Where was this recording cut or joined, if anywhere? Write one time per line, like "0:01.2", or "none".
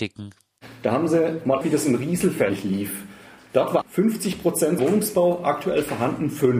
0:01.6
0:03.8
0:04.8